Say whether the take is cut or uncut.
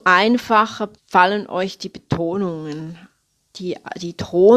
cut